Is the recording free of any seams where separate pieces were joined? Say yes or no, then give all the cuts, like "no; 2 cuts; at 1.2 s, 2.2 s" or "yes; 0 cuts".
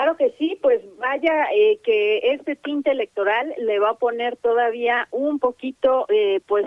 yes; 0 cuts